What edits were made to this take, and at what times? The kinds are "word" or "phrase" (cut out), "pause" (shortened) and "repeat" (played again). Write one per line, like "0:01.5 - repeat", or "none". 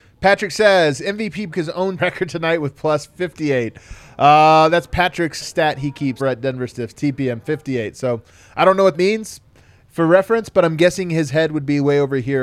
0:01.5 - word
0:02.0 - word
0:05.4 - word
0:06.2 - word
0:08.9 - word